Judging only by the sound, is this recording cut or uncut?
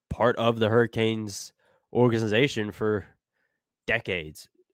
uncut